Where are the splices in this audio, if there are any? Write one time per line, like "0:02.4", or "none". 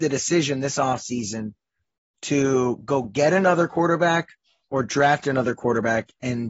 none